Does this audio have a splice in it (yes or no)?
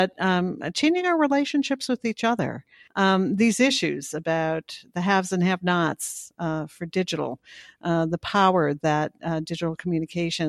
no